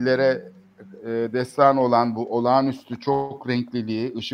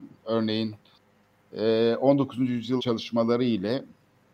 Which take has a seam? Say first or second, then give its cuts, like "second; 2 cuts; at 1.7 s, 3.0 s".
second; 1 cut; at 2.8 s